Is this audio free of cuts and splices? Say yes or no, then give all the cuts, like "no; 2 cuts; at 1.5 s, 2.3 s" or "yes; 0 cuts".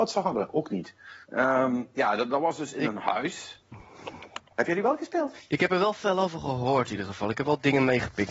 no; 3 cuts; at 1.2 s, 4.5 s, 5.5 s